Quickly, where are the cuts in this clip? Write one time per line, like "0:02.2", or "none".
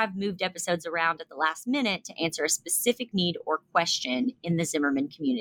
none